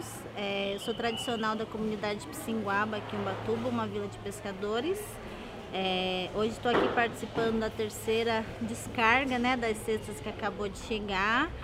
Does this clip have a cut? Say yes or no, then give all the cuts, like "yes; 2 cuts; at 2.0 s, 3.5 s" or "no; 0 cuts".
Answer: no; 0 cuts